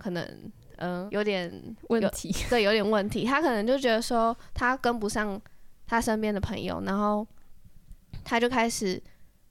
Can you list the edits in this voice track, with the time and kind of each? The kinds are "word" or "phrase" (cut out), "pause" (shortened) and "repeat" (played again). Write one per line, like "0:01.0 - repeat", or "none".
0:01.1 - word

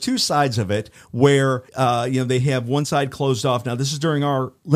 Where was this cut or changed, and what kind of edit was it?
0:01.7 - pause

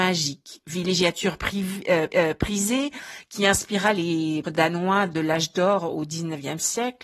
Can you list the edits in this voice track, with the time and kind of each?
0:02.1 - repeat
0:04.4 - word

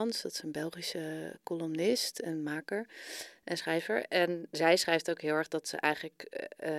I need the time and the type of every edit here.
none

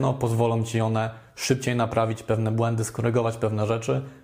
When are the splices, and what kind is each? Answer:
none

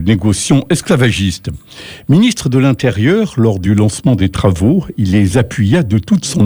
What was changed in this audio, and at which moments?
none

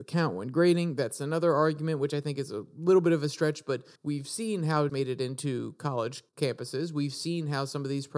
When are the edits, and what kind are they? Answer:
0:04.0 - pause
0:04.9 - phrase
0:06.3 - pause

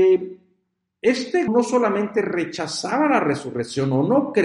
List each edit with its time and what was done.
0:01.5 - word

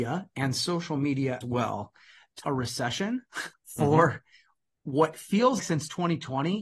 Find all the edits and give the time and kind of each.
0:01.4 - word
0:02.5 - phrase
0:03.5 - pause
0:05.6 - word

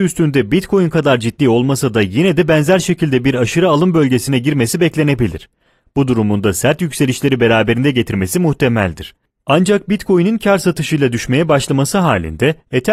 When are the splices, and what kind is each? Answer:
none

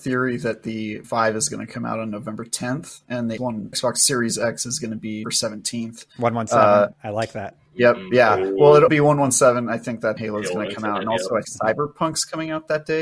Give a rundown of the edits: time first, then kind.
0:01.0 - word
0:03.4 - word
0:03.7 - word
0:05.2 - word
0:06.9 - word
0:08.9 - word
0:10.2 - word
0:11.4 - word

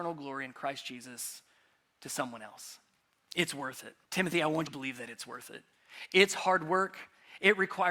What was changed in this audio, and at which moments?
0:03.0 - pause
0:04.0 - pause
0:04.7 - word

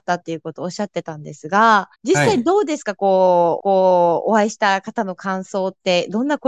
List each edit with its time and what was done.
0:02.0 - pause
0:03.6 - repeat

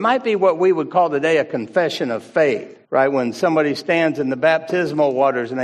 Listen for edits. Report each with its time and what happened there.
0:02.8 - pause

